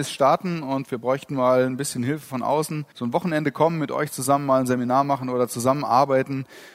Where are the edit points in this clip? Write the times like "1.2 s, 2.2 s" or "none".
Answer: 2.9 s